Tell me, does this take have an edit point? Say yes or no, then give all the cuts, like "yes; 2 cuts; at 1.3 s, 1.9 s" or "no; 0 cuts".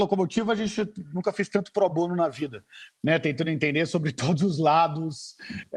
no; 0 cuts